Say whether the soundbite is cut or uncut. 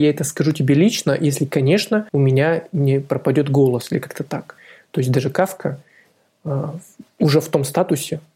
cut